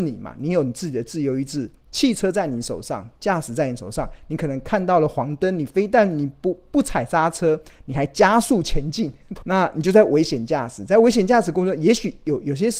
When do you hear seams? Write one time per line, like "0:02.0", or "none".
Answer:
0:09.4